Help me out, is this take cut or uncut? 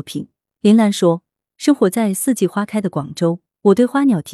uncut